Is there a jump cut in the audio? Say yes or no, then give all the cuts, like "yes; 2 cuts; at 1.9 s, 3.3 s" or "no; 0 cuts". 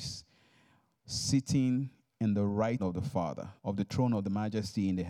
yes; 2 cuts; at 2.8 s, 3.6 s